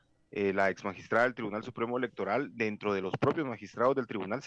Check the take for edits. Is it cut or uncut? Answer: uncut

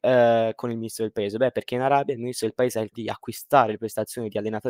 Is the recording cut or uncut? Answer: cut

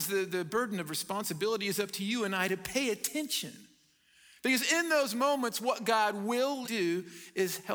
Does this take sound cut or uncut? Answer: cut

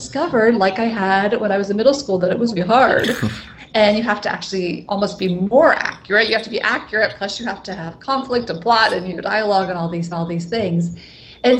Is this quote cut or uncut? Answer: cut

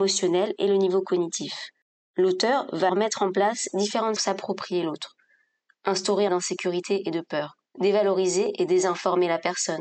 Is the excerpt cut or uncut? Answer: cut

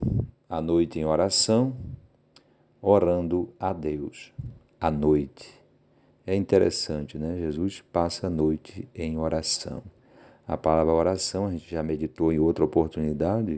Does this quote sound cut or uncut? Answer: uncut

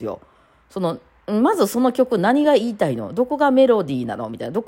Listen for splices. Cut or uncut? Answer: uncut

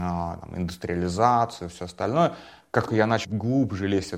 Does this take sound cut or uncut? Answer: cut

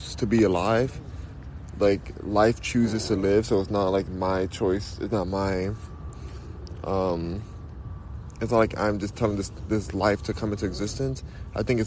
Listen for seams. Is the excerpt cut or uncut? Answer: uncut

